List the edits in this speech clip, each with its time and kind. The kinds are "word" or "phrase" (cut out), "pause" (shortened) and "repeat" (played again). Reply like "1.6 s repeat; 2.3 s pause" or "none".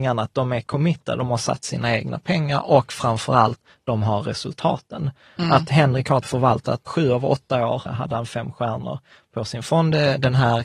6.2 s word; 6.9 s word; 7.9 s word